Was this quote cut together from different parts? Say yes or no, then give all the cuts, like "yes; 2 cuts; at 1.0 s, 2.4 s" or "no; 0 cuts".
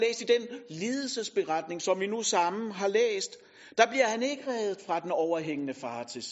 no; 0 cuts